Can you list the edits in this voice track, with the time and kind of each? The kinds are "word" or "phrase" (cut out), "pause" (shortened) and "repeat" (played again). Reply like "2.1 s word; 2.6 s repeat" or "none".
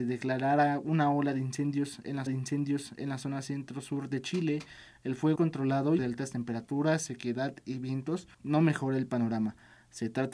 2.3 s repeat; 5.4 s phrase; 6.0 s phrase; 8.3 s pause